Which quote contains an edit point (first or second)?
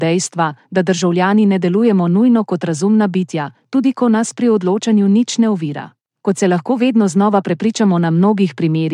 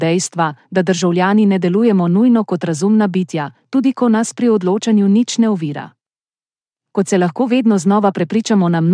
first